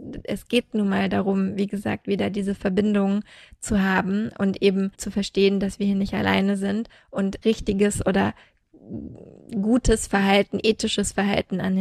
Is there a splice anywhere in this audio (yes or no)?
yes